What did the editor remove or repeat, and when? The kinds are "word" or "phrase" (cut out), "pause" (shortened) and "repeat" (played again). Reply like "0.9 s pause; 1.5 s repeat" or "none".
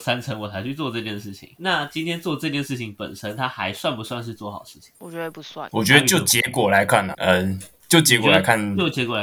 5.7 s word; 7.1 s word